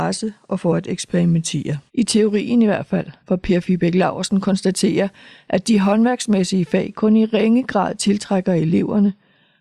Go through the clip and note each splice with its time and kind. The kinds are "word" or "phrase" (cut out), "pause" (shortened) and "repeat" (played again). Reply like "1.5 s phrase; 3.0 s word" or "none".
1.9 s pause; 3.2 s pause